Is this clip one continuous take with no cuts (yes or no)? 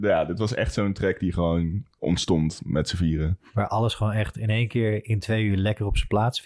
no